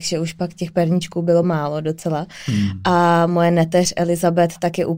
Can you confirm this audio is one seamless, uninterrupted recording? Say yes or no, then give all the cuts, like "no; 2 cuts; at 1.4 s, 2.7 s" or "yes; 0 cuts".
yes; 0 cuts